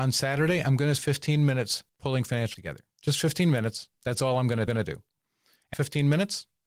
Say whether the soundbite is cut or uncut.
cut